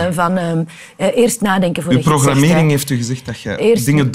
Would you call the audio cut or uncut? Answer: uncut